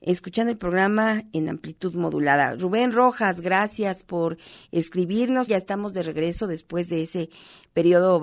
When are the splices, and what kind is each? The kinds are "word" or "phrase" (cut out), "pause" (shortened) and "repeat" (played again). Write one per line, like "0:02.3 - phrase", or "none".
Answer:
0:05.5 - phrase